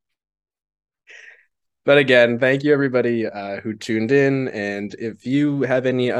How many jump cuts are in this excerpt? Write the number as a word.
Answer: zero